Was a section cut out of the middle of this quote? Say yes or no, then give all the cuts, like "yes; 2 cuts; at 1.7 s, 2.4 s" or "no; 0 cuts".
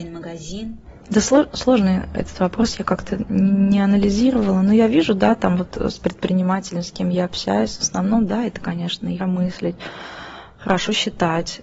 yes; 2 cuts; at 1.0 s, 9.2 s